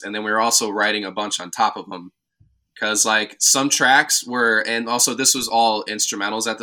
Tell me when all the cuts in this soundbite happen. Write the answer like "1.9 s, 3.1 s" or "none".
none